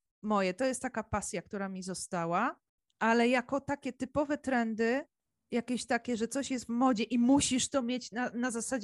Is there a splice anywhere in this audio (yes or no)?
no